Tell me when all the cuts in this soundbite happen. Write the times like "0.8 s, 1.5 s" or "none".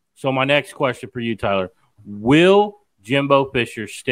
none